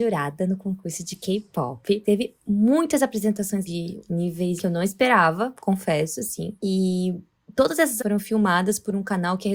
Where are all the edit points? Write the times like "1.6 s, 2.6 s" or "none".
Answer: 3.7 s, 4.6 s, 8.0 s